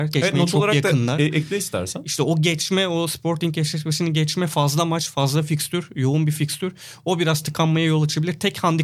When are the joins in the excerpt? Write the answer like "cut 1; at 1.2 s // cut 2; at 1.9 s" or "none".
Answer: none